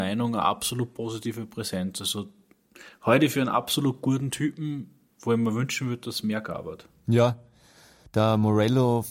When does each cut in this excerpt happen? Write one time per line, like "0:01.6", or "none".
none